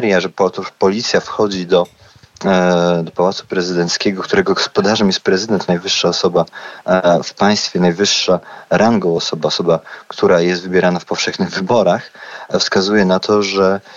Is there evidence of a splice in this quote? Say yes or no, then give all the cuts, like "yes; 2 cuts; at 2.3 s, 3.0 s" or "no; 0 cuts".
no; 0 cuts